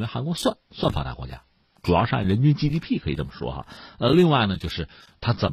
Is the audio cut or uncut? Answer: uncut